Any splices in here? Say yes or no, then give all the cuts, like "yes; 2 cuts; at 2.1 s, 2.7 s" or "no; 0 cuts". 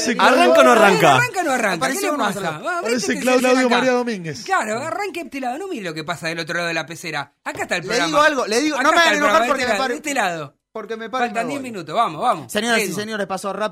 yes; 3 cuts; at 2.8 s, 3.4 s, 5.3 s